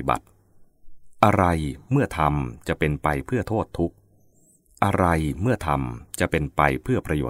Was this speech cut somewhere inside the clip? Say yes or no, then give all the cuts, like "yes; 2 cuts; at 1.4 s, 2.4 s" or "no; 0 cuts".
no; 0 cuts